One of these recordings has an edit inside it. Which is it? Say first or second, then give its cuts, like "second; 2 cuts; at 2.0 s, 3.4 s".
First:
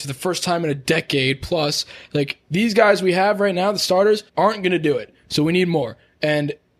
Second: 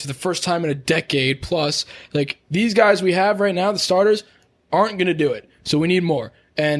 first; 1 cut; at 4.3 s